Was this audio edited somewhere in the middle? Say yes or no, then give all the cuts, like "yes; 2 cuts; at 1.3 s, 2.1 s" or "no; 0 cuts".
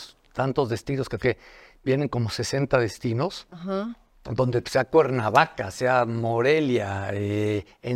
yes; 2 cuts; at 1.2 s, 4.6 s